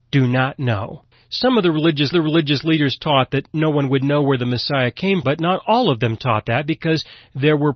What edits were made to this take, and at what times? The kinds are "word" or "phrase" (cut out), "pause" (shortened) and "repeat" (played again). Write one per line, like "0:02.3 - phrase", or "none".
0:01.1 - pause
0:02.1 - repeat
0:05.2 - word